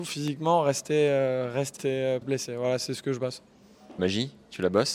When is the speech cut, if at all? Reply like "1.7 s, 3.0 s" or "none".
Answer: 1.8 s, 2.2 s, 4.0 s

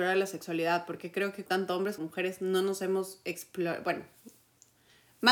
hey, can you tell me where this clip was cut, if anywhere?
1.5 s, 2.0 s

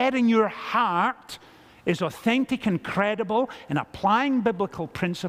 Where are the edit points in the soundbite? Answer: none

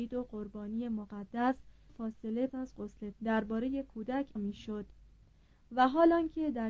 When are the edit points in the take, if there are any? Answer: 1.9 s, 2.5 s, 3.1 s, 4.4 s

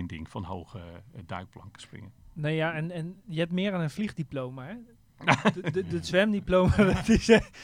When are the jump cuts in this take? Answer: none

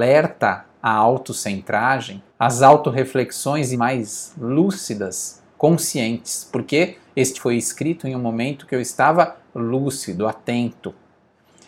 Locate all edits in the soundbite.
2.3 s, 3.7 s, 7.3 s

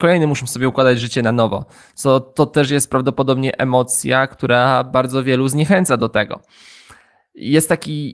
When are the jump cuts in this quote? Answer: none

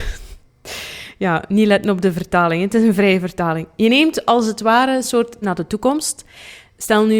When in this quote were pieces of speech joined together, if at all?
5.4 s

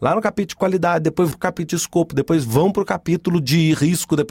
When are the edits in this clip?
1.3 s

